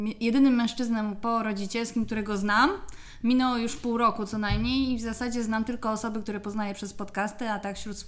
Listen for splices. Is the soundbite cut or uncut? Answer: uncut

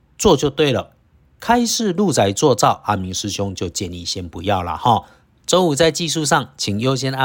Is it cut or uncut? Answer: uncut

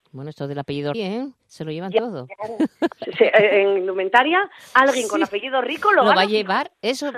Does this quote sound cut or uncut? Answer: cut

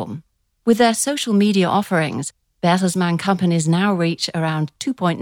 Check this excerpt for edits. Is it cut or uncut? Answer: uncut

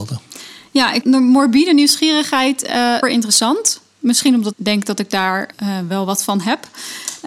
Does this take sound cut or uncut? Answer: cut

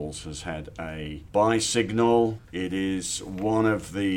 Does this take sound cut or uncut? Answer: uncut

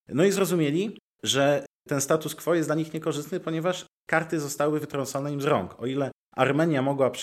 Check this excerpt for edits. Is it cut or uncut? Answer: uncut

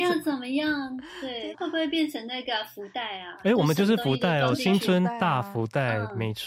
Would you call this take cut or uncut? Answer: cut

